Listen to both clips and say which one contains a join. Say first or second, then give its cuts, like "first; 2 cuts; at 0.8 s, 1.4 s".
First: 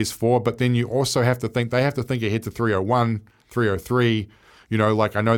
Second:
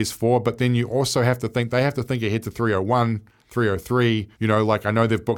second; 1 cut; at 4.3 s